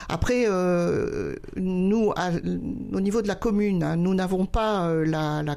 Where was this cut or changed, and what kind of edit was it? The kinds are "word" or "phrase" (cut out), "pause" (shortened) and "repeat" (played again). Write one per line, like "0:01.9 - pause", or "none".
none